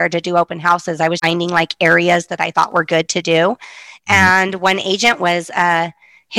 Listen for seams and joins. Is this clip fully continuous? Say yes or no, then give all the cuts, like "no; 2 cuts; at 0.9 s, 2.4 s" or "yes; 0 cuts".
no; 1 cut; at 1.2 s